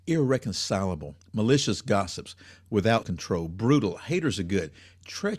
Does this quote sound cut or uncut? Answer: cut